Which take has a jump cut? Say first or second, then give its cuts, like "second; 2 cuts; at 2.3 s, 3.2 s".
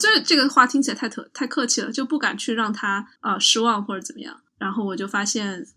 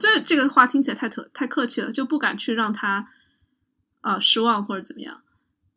first; 2 cuts; at 3.2 s, 4.5 s